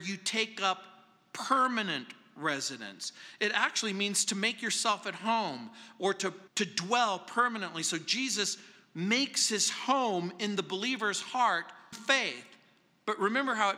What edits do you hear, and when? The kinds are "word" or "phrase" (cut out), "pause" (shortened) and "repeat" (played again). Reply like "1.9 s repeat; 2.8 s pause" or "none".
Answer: 6.5 s pause; 11.9 s word